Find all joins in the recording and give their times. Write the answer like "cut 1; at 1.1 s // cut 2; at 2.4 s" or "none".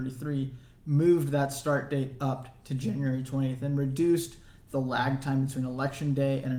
none